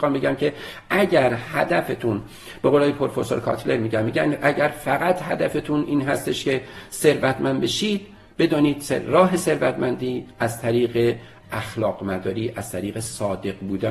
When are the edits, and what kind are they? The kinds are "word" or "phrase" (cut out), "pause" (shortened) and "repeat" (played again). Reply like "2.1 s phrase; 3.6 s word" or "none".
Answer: none